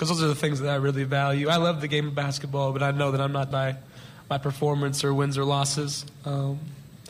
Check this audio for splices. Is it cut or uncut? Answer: cut